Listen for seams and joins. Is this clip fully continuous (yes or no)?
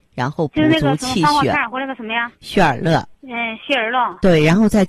no